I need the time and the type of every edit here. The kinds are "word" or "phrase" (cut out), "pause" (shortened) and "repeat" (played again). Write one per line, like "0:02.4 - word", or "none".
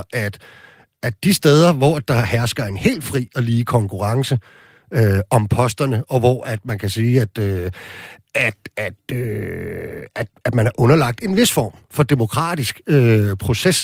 none